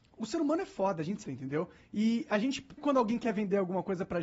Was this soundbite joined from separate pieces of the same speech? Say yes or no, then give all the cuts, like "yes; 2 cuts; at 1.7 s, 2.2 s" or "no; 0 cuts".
yes; 2 cuts; at 1.2 s, 2.8 s